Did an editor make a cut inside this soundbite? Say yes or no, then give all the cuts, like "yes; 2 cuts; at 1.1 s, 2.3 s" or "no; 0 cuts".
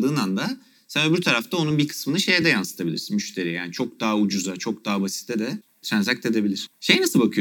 no; 0 cuts